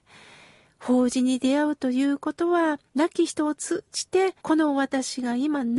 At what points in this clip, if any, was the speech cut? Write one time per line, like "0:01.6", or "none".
0:02.9
0:04.4